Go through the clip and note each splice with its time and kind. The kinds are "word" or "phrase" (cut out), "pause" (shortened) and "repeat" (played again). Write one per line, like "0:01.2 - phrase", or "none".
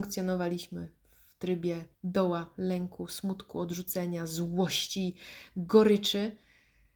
0:01.9 - pause